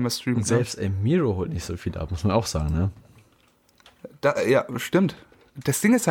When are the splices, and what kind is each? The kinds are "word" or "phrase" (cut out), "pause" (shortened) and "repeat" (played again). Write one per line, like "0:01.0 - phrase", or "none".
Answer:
none